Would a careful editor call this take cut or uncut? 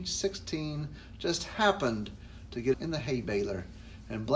cut